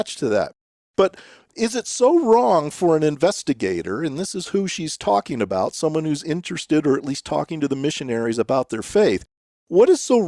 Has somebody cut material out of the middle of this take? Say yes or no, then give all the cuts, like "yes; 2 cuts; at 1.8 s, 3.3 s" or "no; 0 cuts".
no; 0 cuts